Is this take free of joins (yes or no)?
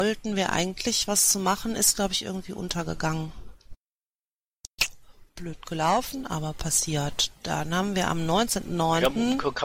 no